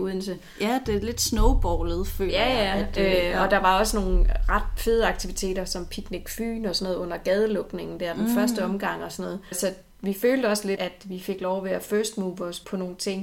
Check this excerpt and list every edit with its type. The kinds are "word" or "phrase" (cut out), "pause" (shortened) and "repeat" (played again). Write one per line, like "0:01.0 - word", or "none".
none

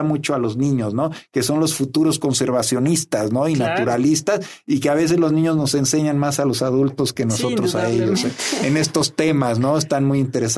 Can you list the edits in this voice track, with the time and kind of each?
none

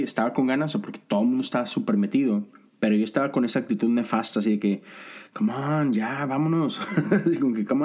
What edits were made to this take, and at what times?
none

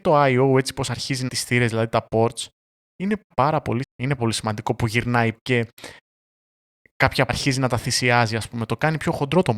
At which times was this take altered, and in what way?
0:01.3 - word
0:03.3 - word
0:03.8 - word
0:04.2 - word
0:05.3 - word
0:07.3 - word

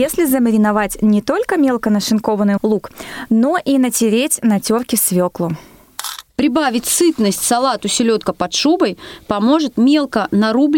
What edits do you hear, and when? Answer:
0:02.6 - word
0:06.3 - pause

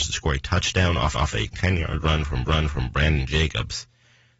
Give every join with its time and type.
0:01.1 - repeat
0:02.4 - repeat

